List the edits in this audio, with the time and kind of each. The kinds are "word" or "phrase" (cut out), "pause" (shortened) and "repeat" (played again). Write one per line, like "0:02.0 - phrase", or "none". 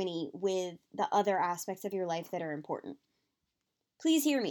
none